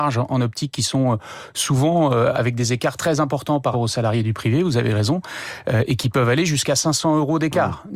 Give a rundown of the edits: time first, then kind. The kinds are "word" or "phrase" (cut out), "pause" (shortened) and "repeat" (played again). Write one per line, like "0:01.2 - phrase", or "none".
0:03.7 - word